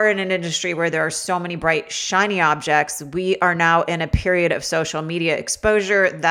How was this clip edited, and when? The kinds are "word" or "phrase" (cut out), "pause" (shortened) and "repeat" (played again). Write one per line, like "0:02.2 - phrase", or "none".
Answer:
none